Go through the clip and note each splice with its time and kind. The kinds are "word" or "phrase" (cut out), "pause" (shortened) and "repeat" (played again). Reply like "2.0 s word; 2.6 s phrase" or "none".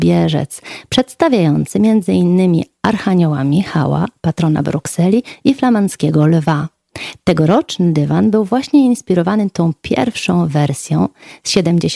none